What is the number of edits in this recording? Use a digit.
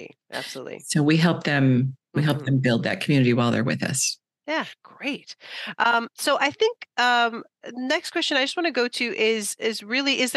1